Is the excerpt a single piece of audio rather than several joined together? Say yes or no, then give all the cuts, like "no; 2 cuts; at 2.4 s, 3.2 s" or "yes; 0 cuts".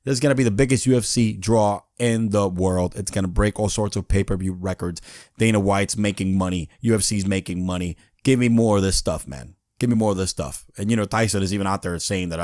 yes; 0 cuts